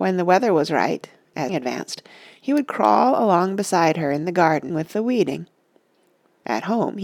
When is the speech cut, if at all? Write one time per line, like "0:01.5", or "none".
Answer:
0:01.5
0:04.7